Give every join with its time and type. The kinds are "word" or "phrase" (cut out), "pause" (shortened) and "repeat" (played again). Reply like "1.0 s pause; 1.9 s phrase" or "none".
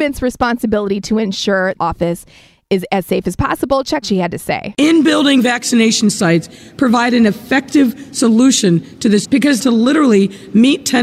1.8 s phrase; 4.0 s phrase; 9.2 s word; 9.6 s phrase